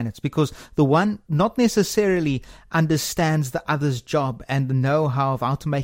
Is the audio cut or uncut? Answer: uncut